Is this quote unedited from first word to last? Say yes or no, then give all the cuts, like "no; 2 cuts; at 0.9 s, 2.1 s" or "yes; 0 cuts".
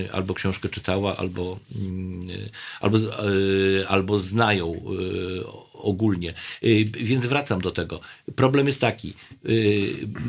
yes; 0 cuts